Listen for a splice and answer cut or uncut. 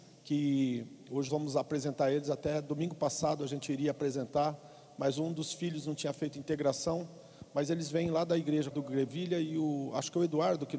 cut